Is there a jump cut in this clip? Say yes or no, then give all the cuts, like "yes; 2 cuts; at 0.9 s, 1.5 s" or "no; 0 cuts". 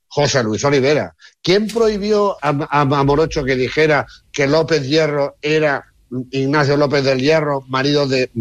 yes; 1 cut; at 2.4 s